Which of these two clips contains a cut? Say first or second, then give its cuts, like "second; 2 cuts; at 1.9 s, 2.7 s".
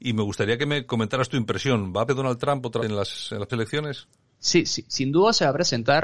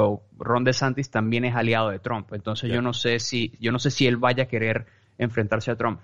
first; 3 cuts; at 2.1 s, 2.8 s, 3.5 s